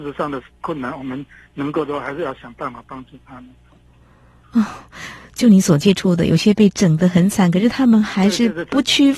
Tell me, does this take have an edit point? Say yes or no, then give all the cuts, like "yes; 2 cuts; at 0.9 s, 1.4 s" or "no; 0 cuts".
no; 0 cuts